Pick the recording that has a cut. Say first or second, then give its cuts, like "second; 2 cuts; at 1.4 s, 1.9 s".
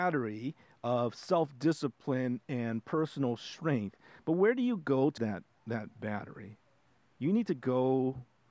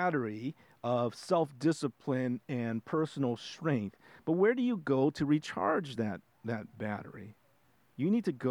first; 1 cut; at 5.2 s